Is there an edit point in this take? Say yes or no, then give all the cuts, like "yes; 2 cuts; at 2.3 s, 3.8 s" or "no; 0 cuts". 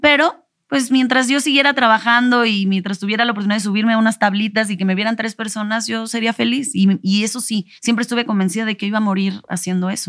yes; 1 cut; at 7.8 s